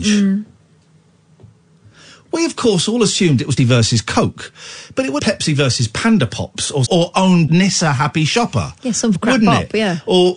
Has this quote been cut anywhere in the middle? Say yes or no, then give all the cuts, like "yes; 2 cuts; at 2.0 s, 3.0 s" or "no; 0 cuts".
yes; 5 cuts; at 3.6 s, 5.2 s, 6.9 s, 7.5 s, 9.2 s